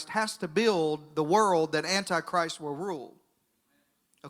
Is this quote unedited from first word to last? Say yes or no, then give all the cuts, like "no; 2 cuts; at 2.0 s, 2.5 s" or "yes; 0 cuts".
yes; 0 cuts